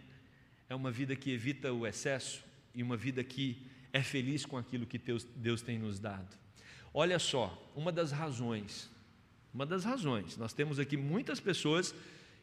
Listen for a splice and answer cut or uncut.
uncut